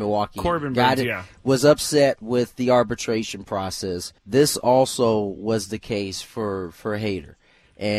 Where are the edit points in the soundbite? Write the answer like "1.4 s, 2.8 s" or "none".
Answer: 4.2 s